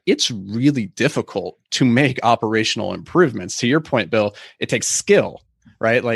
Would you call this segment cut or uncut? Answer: cut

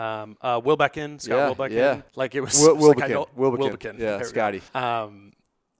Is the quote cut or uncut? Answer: cut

